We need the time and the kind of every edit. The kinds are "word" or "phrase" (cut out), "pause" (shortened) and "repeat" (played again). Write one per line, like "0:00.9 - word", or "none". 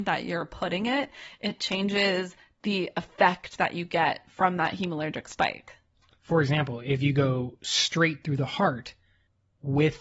none